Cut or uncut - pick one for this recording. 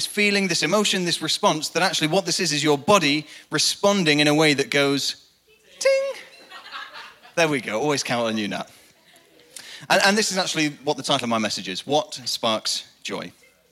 uncut